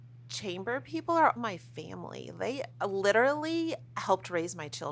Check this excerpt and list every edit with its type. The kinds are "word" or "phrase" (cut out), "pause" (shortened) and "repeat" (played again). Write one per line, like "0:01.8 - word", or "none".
0:01.4 - word